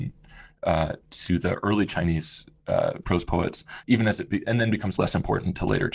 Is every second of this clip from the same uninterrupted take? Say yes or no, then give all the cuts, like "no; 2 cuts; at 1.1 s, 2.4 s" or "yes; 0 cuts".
no; 3 cuts; at 3.8 s, 4.4 s, 5.0 s